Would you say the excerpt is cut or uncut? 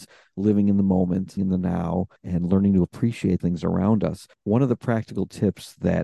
cut